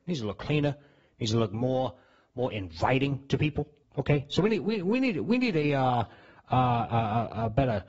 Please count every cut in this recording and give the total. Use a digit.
1